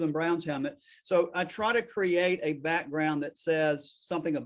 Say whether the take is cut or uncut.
uncut